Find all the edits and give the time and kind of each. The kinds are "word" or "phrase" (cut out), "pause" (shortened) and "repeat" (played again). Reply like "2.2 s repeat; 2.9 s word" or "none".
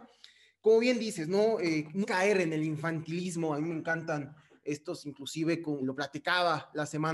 2.0 s word; 5.8 s word

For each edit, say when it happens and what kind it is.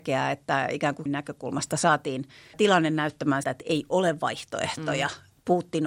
1.1 s word; 2.5 s word; 3.4 s word

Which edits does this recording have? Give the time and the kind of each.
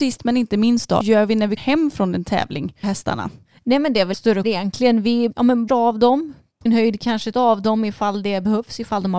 1.0 s word; 1.6 s word; 2.8 s word; 4.1 s word; 4.4 s word; 5.3 s word; 5.7 s word; 6.7 s word; 7.3 s word

